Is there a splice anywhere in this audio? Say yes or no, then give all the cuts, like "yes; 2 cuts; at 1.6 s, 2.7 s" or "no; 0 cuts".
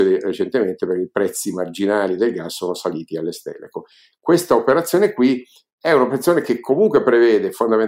no; 0 cuts